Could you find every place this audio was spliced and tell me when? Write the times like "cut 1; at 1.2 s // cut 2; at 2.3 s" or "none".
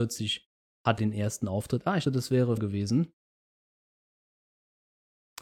cut 1; at 1.0 s // cut 2; at 2.1 s // cut 3; at 2.6 s